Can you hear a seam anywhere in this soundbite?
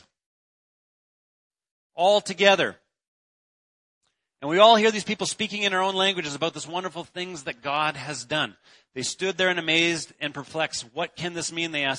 no; 0 cuts

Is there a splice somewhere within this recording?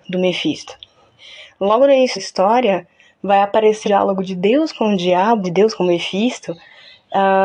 yes; 3 cuts; at 2.2 s, 3.8 s, 5.4 s

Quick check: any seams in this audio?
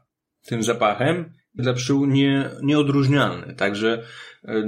yes; 1 cut; at 1.6 s

